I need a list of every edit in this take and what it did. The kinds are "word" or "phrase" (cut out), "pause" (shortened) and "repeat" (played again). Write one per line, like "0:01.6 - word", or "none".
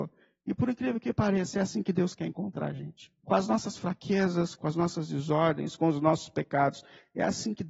0:03.2 - pause